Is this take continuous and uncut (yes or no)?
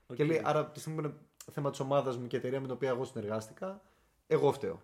yes